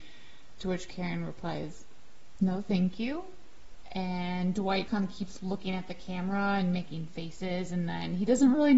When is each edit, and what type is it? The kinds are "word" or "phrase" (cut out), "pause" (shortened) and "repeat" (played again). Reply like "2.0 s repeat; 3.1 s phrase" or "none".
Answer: 2.4 s word; 4.9 s word